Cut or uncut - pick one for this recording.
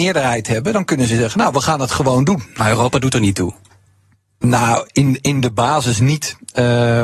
uncut